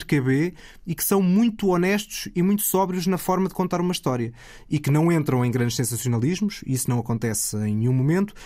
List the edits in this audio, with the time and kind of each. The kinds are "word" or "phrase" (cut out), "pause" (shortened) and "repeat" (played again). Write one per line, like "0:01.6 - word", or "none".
none